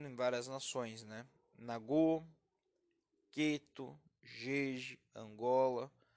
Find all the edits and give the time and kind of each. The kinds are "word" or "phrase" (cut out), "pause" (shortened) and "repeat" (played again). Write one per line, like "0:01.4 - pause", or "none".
none

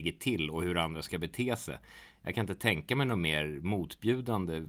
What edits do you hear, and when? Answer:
none

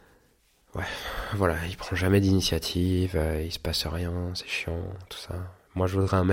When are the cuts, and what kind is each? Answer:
none

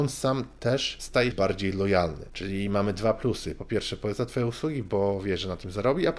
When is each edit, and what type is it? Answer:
0:01.3 - word

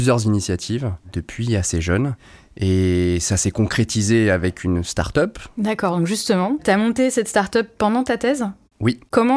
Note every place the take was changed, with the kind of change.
none

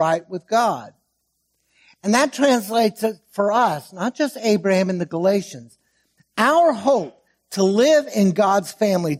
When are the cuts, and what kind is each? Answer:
none

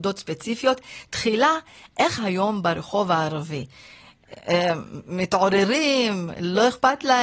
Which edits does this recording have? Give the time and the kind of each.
0:02.2 - word

